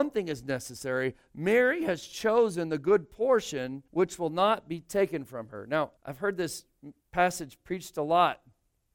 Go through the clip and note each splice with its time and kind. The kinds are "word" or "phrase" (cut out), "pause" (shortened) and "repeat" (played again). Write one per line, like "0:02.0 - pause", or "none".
0:03.9 - pause
0:06.0 - pause
0:07.0 - pause